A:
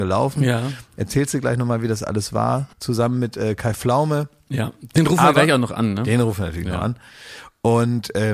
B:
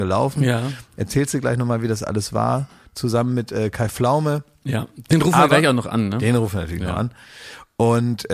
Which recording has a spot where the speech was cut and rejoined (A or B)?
A